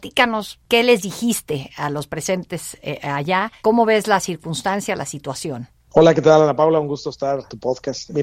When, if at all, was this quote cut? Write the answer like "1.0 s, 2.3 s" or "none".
none